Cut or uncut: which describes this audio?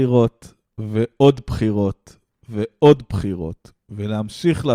uncut